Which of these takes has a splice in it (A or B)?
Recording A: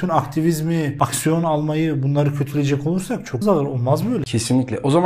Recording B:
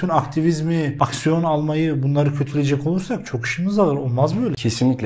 A